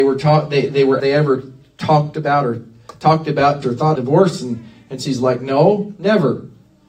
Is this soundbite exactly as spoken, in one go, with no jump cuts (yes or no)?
no